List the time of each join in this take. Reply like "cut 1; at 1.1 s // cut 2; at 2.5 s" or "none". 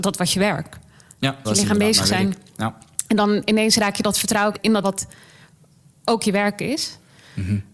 cut 1; at 1.4 s // cut 2; at 4.5 s // cut 3; at 4.8 s